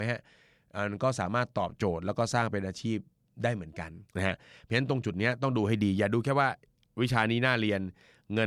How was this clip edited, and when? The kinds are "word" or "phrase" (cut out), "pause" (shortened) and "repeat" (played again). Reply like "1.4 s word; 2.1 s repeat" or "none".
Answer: 4.1 s pause